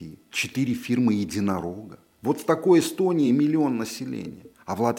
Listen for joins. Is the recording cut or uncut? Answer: uncut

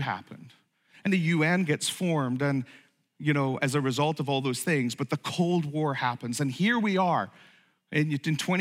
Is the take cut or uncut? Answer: cut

